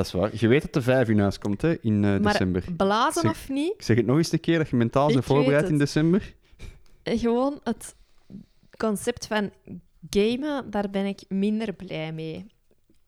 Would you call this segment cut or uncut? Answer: uncut